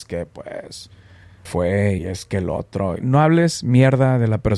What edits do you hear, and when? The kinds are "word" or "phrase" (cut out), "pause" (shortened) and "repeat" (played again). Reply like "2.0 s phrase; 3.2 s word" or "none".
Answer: 1.5 s word; 2.0 s word; 3.0 s word

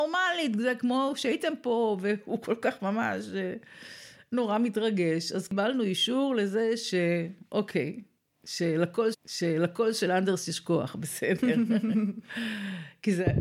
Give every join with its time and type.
9.1 s repeat

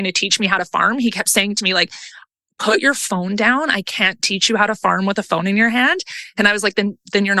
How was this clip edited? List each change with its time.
none

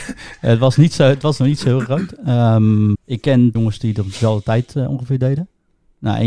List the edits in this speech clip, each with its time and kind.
2.9 s word; 3.5 s phrase

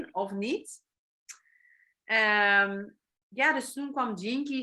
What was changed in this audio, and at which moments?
none

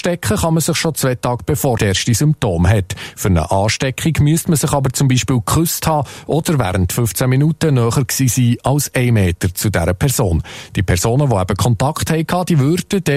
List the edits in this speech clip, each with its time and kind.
1.8 s phrase

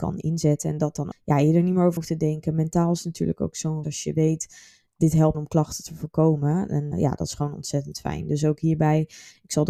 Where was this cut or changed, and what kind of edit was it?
1.1 s word; 2.0 s word; 3.8 s word; 5.3 s word; 6.9 s word

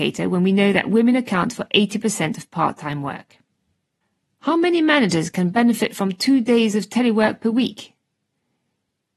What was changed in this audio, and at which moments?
none

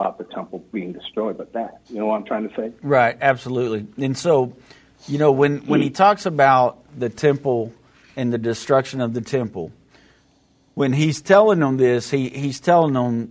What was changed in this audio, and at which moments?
1.8 s pause; 6.9 s word

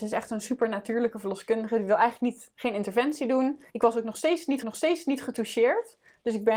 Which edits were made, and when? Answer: 3.7 s pause; 4.6 s repeat

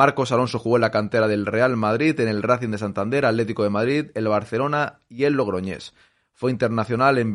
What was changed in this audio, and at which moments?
none

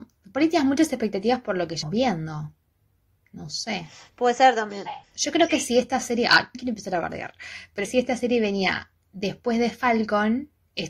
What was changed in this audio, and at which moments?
1.8 s word; 6.5 s word; 7.8 s phrase

